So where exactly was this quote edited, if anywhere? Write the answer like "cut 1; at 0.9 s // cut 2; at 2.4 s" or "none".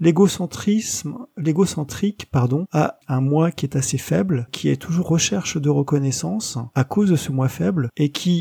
cut 1; at 3.0 s // cut 2; at 4.5 s // cut 3; at 5.0 s